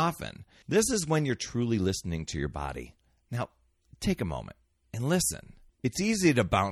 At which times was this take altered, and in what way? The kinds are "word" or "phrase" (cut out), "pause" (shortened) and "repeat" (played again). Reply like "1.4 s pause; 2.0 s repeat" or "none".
none